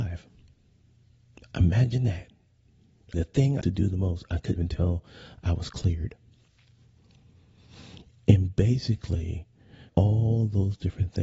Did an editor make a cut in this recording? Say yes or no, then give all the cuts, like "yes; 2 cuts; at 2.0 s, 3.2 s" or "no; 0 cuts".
yes; 4 cuts; at 3.1 s, 3.6 s, 4.6 s, 9.9 s